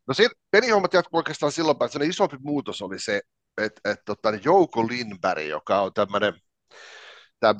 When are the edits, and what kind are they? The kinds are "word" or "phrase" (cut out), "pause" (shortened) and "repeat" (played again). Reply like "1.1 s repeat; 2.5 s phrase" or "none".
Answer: none